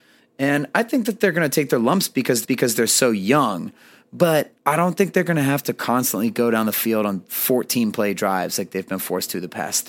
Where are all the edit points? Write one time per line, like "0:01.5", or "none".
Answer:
0:02.4
0:04.6